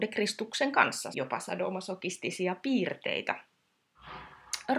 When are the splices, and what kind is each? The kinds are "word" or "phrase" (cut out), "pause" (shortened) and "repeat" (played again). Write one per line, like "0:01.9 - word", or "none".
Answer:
0:01.1 - word